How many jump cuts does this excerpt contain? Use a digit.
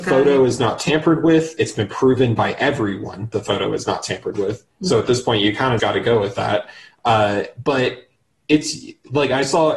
2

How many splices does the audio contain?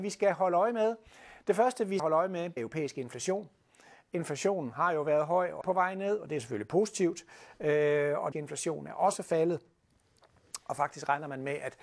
4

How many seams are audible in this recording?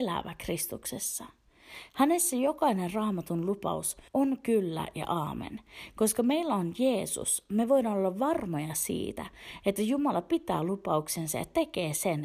1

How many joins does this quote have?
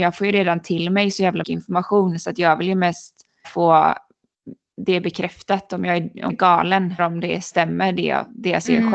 4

